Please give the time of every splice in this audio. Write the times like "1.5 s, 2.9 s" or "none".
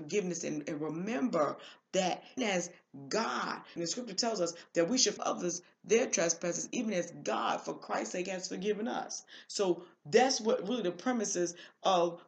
2.4 s, 3.8 s, 5.2 s